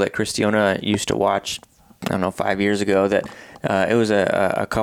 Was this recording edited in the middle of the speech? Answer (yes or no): no